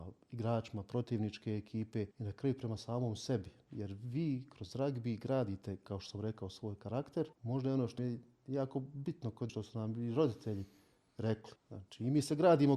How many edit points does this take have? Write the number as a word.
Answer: five